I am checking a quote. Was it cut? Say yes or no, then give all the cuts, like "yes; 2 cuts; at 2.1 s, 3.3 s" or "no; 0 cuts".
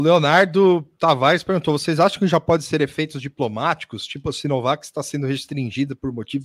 no; 0 cuts